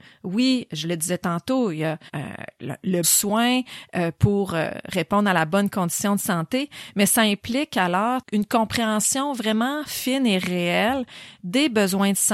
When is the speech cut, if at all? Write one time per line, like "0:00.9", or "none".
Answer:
0:02.1
0:03.0